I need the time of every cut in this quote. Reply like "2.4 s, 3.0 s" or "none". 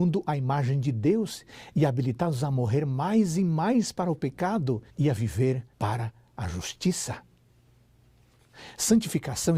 4.9 s, 5.7 s

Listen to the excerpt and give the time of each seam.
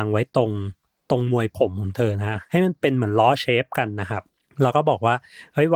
none

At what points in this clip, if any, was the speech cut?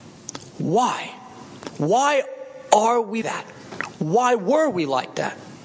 3.2 s

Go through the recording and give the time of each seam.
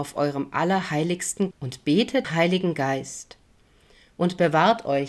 1.5 s, 2.2 s

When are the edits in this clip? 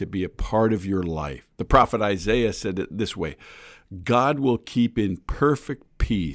1.5 s

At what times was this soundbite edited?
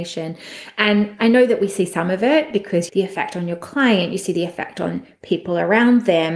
2.9 s

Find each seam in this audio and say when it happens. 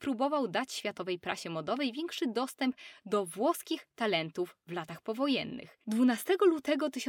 none

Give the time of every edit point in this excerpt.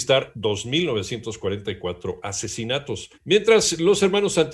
3.1 s

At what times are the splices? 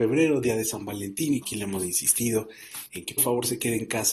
1.4 s, 3.2 s

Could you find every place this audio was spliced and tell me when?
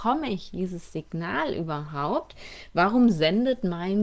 none

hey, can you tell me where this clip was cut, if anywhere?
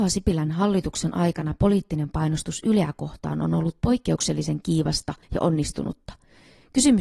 5.2 s

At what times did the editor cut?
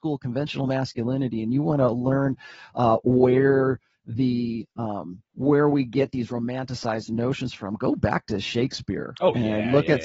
5.3 s

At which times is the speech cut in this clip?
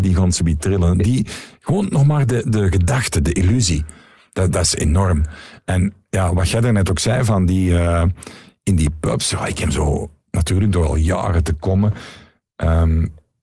none

